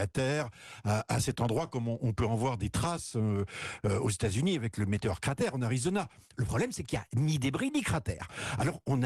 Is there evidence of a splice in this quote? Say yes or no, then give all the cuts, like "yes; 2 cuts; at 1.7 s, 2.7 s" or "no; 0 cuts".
no; 0 cuts